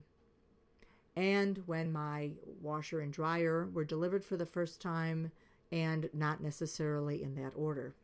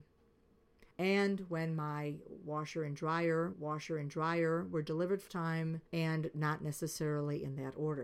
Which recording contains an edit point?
second; 4 cuts; at 0.9 s, 3.5 s, 5.3 s, 5.9 s

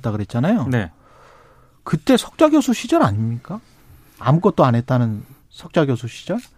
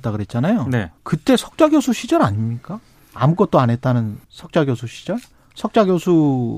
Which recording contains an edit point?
second; 3 cuts; at 1.0 s, 3.0 s, 4.2 s

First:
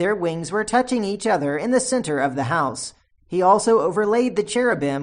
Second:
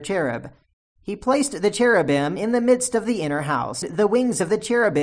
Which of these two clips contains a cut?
second; 1 cut; at 3.8 s

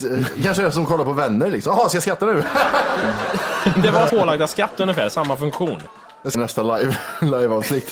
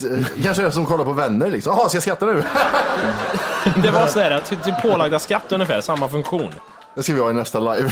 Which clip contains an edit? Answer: first; 2 cuts; at 4.1 s, 6.3 s

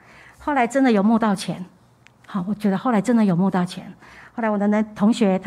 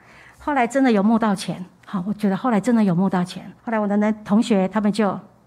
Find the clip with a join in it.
second; 2 cuts; at 1.8 s, 3.6 s

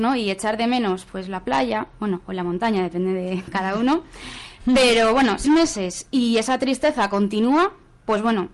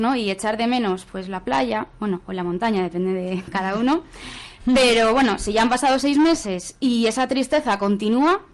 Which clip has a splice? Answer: first; 1 cut; at 5.4 s

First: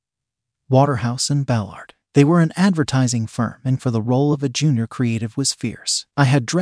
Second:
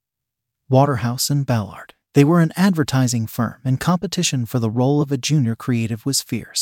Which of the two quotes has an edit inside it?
first; 1 cut; at 3.8 s

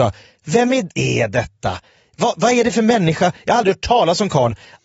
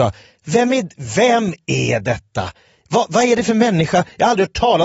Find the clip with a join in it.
first; 1 cut; at 0.9 s

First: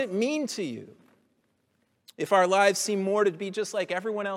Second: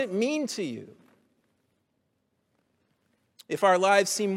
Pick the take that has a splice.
first; 1 cut; at 1.7 s

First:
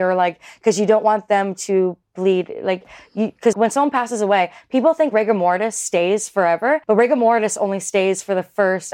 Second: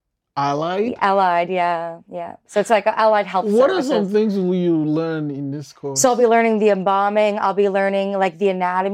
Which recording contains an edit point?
first; 2 cuts; at 3.5 s, 6.8 s

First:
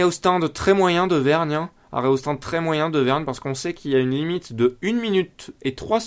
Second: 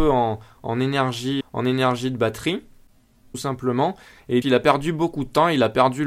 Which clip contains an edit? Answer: second; 2 cuts; at 1.4 s, 4.4 s

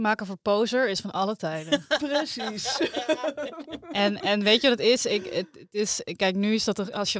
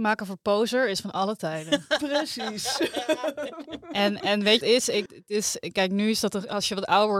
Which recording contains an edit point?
second; 2 cuts; at 4.6 s, 5.1 s

